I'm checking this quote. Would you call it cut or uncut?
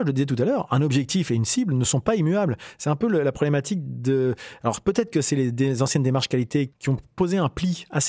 uncut